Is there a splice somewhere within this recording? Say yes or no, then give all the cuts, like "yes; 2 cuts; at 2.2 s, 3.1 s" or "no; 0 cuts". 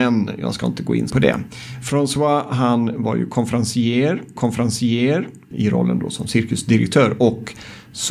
yes; 2 cuts; at 1.1 s, 4.4 s